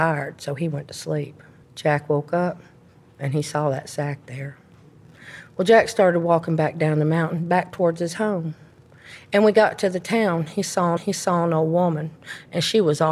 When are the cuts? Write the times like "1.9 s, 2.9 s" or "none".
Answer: 1.6 s, 11.0 s